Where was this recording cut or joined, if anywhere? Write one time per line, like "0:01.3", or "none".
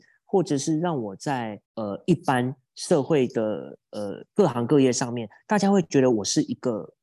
0:01.7
0:04.3

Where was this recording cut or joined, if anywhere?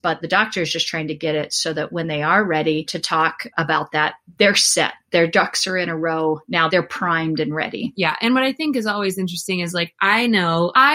none

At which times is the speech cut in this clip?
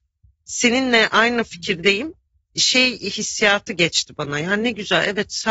none

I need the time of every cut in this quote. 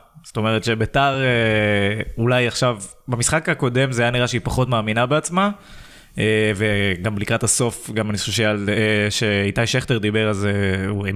none

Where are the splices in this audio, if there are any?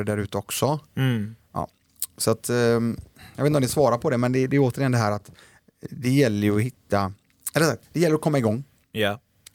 none

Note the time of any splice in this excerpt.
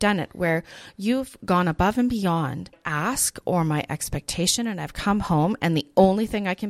none

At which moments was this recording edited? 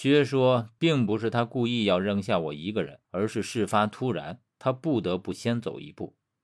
0:03.0

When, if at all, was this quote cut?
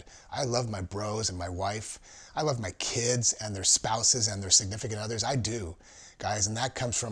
none

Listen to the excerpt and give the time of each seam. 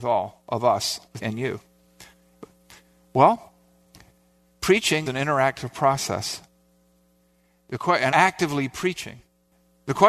0:01.2
0:05.1
0:08.1

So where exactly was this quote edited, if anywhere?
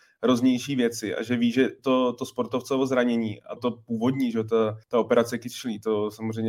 0:03.6
0:04.8

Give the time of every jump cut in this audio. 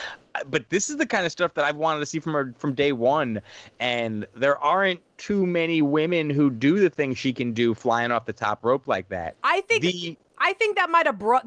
0:09.4

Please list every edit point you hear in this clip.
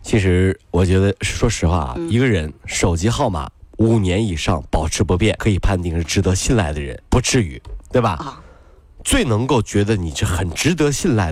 0:05.4
0:07.0

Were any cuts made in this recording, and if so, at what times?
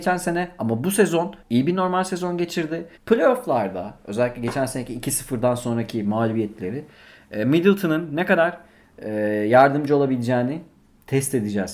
0:01.4
0:03.0

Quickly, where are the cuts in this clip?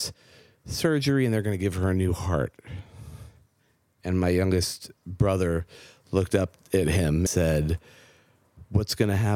0:05.0
0:07.3

